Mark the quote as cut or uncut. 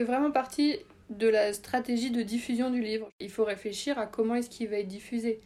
uncut